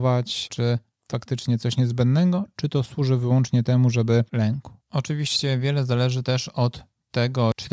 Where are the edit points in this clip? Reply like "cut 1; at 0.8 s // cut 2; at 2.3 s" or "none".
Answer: cut 1; at 1.1 s // cut 2; at 4.3 s